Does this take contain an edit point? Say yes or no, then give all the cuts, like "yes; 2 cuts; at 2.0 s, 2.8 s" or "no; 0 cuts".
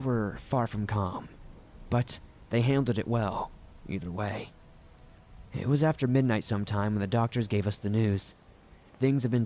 no; 0 cuts